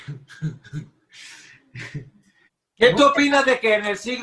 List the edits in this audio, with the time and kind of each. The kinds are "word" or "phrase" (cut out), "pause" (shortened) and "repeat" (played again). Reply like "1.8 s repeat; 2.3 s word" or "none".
2.4 s pause

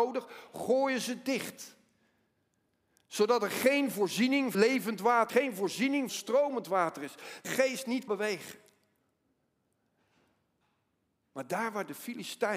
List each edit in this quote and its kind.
4.5 s word; 5.3 s word; 6.1 s word; 7.4 s word; 8.1 s word

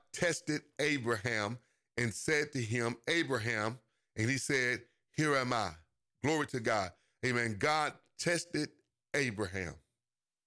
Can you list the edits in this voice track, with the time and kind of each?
none

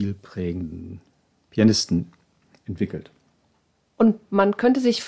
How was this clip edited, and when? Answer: none

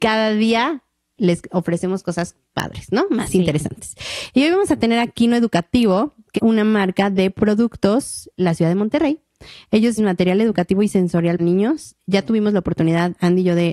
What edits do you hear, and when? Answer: 2.5 s word; 6.4 s word; 8.4 s word; 10.0 s word; 11.4 s word

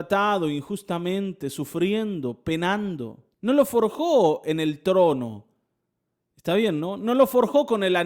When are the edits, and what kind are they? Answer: 3.3 s pause

